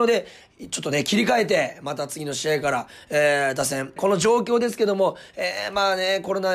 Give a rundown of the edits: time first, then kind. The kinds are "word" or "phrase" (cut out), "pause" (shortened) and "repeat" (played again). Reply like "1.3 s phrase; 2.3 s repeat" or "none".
4.0 s phrase